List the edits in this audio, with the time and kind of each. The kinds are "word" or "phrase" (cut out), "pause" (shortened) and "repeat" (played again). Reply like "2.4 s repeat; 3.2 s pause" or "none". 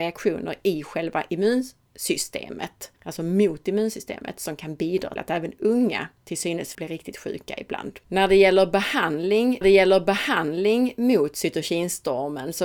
3.0 s pause; 5.2 s word; 6.7 s word; 8.0 s pause; 9.6 s repeat